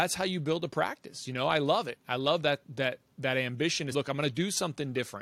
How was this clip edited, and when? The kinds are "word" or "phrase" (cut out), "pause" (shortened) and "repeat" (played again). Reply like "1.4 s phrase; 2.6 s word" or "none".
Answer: 3.9 s word

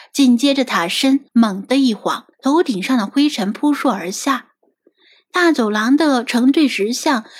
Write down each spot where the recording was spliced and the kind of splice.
1.3 s pause; 2.3 s pause

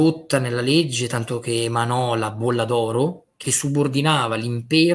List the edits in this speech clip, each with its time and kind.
3.4 s phrase

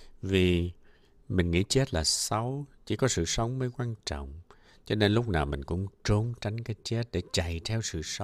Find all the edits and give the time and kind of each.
none

